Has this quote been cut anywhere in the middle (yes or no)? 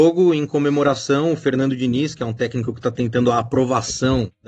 no